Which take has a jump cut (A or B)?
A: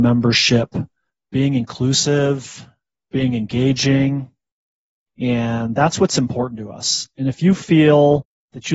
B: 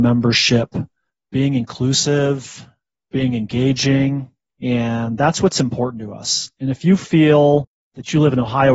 B